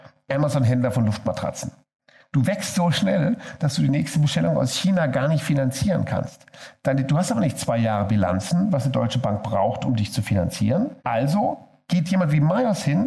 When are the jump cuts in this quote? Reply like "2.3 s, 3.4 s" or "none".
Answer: 11.0 s